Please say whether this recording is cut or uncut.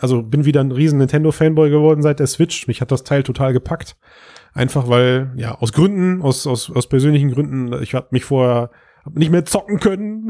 uncut